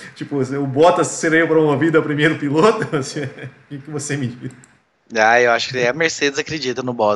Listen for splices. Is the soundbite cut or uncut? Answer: uncut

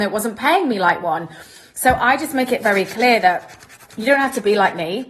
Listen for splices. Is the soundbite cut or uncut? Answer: uncut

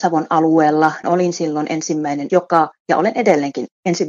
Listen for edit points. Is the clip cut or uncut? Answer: cut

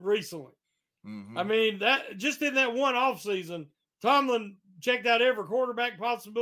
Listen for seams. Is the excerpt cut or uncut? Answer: cut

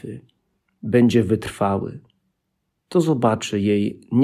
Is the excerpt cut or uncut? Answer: uncut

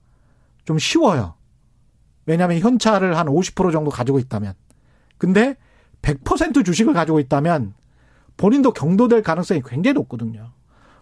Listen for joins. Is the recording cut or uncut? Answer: uncut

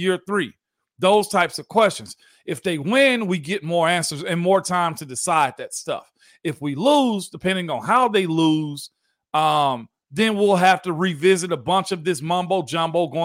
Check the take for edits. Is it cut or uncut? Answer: uncut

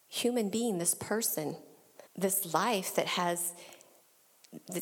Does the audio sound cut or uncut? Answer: cut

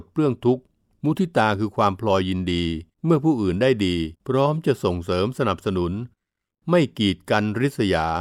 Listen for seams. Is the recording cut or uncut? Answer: cut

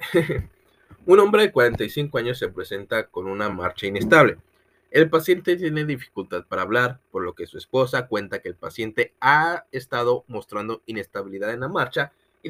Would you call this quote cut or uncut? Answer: uncut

